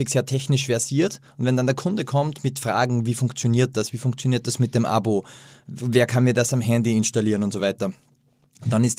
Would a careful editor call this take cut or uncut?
uncut